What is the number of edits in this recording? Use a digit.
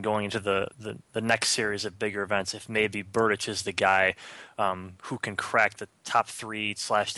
1